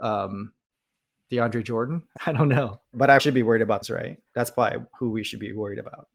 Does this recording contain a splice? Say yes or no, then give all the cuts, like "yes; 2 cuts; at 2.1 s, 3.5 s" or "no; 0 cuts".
yes; 5 cuts; at 2.2 s, 3.2 s, 3.8 s, 4.3 s, 4.9 s